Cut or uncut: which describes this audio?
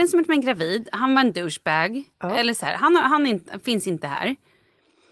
cut